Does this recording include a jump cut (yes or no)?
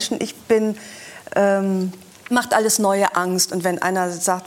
yes